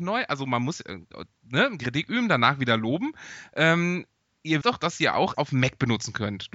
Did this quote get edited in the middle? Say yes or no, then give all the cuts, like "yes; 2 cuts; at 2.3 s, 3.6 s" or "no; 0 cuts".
yes; 3 cuts; at 1.8 s, 4.6 s, 5.3 s